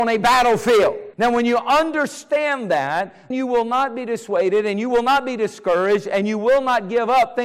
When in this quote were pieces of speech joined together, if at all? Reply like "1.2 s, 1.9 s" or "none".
1.1 s, 3.3 s

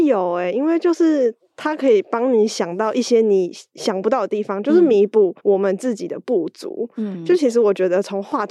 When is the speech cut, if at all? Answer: 5.4 s

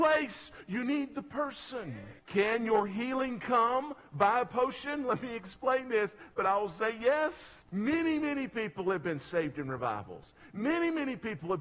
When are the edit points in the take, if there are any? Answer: 2.2 s, 7.6 s

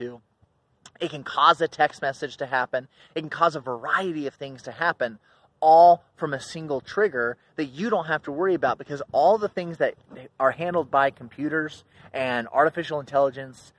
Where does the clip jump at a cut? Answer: none

